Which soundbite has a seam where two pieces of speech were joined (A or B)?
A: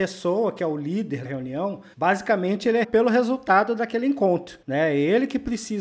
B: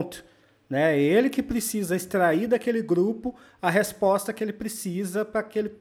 A